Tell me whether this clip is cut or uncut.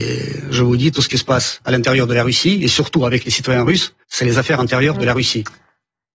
cut